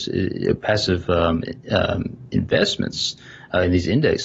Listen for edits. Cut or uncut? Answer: uncut